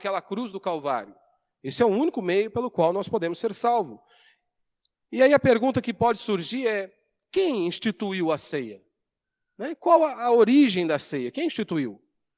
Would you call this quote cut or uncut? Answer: uncut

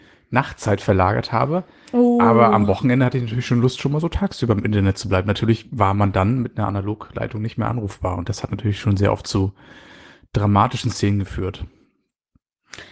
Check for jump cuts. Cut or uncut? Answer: uncut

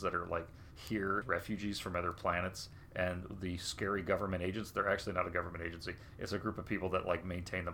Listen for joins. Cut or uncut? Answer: cut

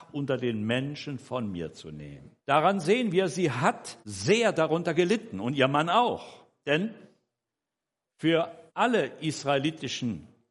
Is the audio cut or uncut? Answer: cut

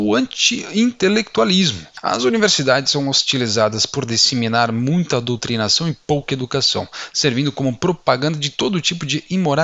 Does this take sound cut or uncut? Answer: uncut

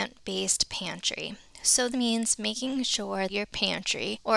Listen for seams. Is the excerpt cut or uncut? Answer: cut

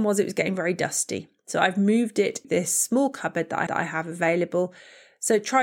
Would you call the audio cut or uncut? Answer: cut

